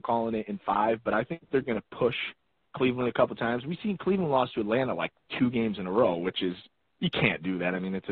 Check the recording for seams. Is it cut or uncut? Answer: uncut